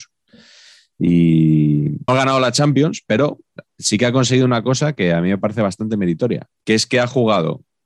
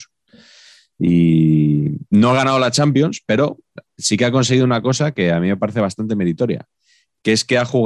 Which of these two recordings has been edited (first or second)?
first